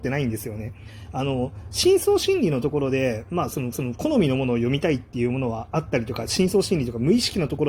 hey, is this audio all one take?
no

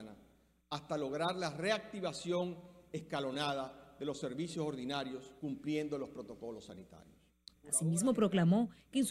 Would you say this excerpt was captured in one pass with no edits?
no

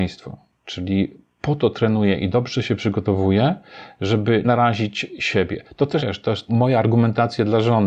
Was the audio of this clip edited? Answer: yes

